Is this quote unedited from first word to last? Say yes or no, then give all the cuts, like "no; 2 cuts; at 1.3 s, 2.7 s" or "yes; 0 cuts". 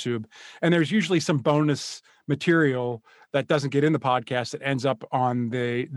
yes; 0 cuts